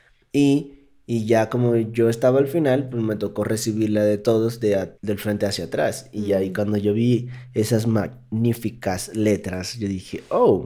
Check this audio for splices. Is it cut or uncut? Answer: cut